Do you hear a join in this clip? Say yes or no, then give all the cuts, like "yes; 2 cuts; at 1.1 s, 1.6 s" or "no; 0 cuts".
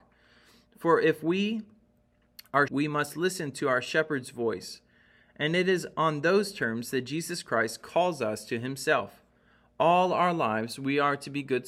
yes; 1 cut; at 2.7 s